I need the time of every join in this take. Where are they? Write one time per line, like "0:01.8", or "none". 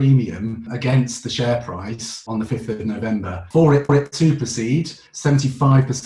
0:03.9
0:05.1